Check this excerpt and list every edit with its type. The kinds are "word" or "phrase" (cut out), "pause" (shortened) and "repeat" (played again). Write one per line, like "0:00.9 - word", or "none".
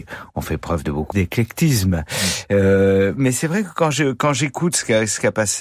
0:01.1 - word
0:03.1 - word